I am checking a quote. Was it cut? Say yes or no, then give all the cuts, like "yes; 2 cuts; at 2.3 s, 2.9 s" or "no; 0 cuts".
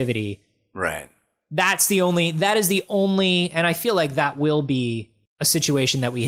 no; 0 cuts